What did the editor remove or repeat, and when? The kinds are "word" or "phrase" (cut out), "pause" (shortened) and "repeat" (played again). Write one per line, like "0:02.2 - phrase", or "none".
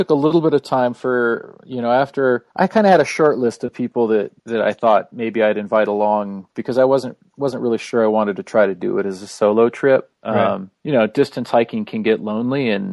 0:02.5 - pause
0:04.4 - pause
0:10.1 - pause
0:10.7 - pause